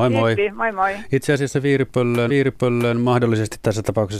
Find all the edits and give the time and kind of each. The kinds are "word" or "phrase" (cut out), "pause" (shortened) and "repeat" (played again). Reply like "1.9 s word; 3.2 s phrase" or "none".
2.3 s repeat